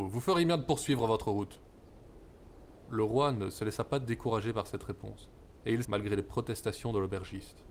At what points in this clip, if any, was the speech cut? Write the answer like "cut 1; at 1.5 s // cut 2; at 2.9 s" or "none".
cut 1; at 5.8 s

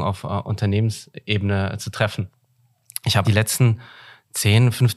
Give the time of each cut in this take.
cut 1; at 3.2 s

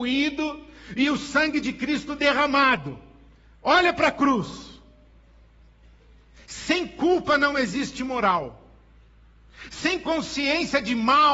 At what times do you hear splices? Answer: none

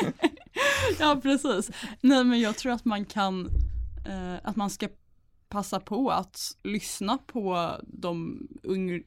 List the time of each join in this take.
cut 1; at 6.6 s

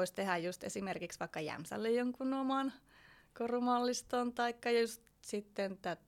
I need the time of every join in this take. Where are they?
none

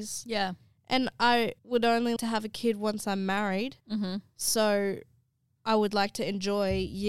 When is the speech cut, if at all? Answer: cut 1; at 1.6 s // cut 2; at 2.2 s // cut 3; at 3.8 s

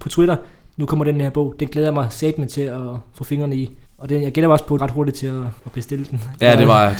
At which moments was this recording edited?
cut 1; at 3.9 s // cut 2; at 4.8 s // cut 3; at 5.6 s

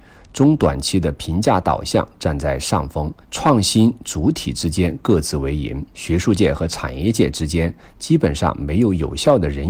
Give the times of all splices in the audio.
cut 1; at 3.2 s // cut 2; at 5.9 s

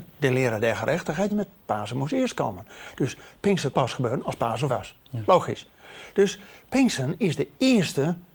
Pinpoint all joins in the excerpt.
cut 1; at 1.3 s // cut 2; at 3.7 s // cut 3; at 4.7 s

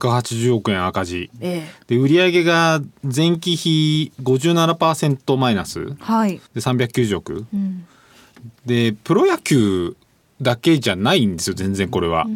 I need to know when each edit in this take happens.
cut 1; at 6.5 s // cut 2; at 8.6 s

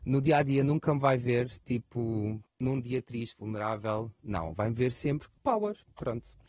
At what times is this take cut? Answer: cut 1; at 2.5 s // cut 2; at 5.4 s

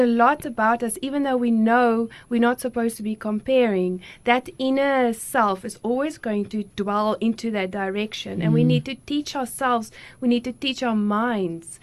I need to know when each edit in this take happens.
none

